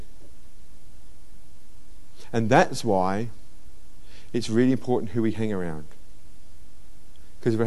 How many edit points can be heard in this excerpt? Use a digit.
0